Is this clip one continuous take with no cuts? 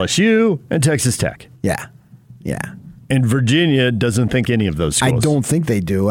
no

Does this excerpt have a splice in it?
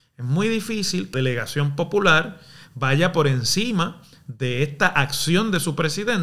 yes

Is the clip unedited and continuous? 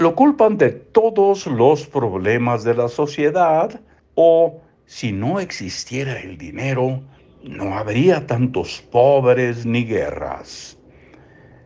no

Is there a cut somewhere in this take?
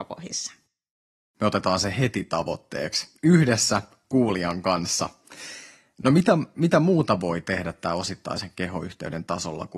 no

